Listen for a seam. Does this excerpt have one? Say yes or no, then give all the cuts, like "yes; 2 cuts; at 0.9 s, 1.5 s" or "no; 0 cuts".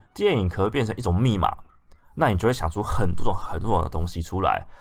no; 0 cuts